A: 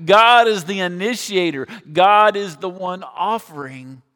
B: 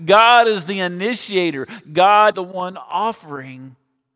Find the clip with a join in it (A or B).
B